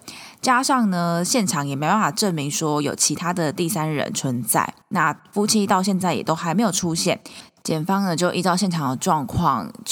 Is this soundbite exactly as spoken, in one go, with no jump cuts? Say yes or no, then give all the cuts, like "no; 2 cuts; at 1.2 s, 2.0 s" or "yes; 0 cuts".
no; 1 cut; at 4.8 s